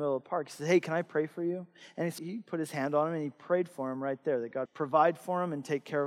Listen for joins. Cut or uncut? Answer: cut